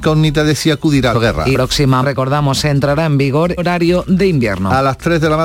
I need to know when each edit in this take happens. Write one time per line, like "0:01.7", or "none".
0:01.1
0:01.5
0:02.0
0:03.6